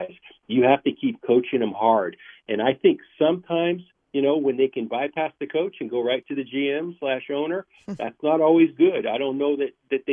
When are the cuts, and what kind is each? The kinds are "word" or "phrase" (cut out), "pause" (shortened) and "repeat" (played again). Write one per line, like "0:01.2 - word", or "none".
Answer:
0:03.9 - pause

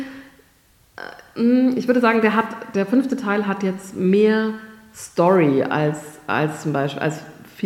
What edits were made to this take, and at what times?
none

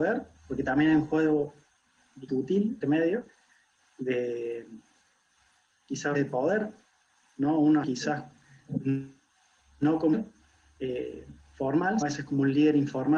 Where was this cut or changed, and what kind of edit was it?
0:02.3 - word
0:02.8 - word
0:06.1 - word
0:07.8 - word
0:12.0 - word

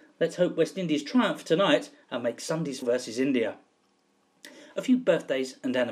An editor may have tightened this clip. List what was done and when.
0:02.8 - word

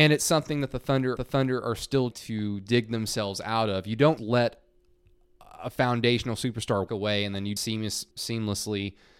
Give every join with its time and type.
0:01.2 - repeat
0:02.1 - word
0:04.2 - word
0:06.9 - word
0:07.6 - word
0:08.1 - pause

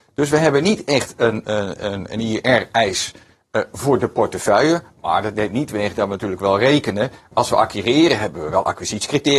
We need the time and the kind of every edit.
0:01.4 - word

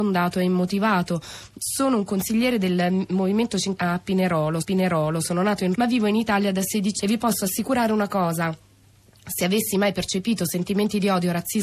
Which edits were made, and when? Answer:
0:03.8 - word
0:04.6 - repeat
0:05.7 - word
0:07.0 - word

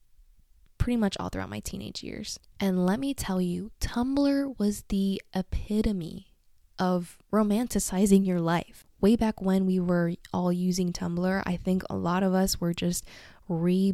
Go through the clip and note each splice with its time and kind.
none

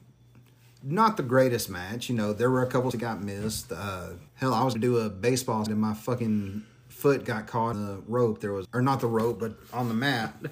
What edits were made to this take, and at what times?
0:02.9 - word
0:04.3 - pause
0:04.7 - word
0:05.7 - word
0:07.7 - word
0:08.6 - word

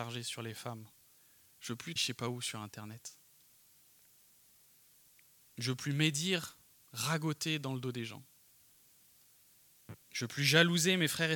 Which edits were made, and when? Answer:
0:02.0 - word

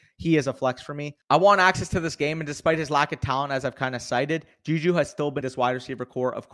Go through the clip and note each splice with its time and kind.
0:05.4 - phrase

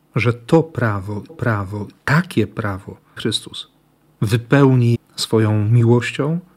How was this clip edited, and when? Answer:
0:01.3 - repeat
0:03.2 - word
0:04.9 - word

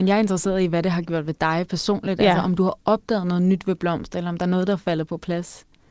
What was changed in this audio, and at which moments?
none

